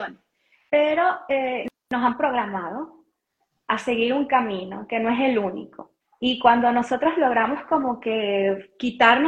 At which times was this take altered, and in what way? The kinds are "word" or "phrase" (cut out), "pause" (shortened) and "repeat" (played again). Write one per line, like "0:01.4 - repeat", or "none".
0:06.0 - pause